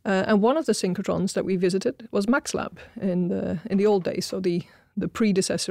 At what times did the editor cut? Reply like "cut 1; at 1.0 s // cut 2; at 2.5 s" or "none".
none